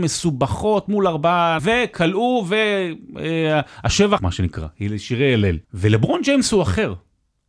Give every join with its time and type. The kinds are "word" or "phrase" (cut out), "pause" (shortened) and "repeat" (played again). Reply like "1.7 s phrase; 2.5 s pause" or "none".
1.6 s word; 4.2 s word; 5.6 s pause